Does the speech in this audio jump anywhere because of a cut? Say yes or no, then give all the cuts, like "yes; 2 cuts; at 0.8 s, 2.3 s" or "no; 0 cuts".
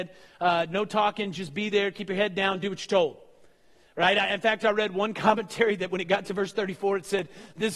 no; 0 cuts